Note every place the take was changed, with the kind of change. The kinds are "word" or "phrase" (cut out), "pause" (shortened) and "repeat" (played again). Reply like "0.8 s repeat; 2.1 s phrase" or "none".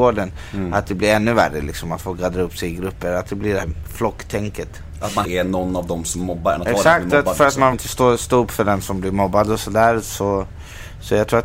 3.6 s word; 5.2 s word; 7.7 s word